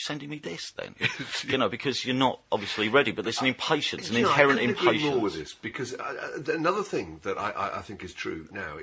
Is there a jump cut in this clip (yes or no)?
no